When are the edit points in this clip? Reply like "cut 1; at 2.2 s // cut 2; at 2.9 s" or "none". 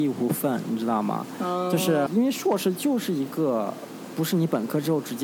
cut 1; at 2.1 s